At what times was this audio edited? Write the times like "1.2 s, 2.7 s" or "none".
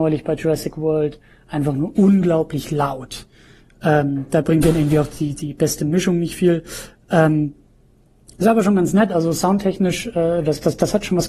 none